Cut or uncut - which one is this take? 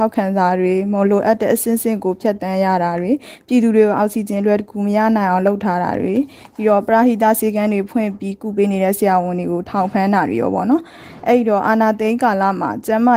uncut